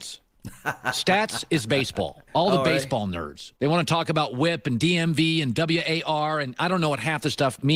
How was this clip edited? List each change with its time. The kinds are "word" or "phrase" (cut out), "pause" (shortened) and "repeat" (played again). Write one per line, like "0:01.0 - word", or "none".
0:02.3 - pause
0:03.6 - pause